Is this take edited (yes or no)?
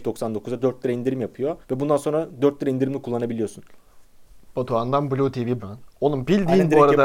yes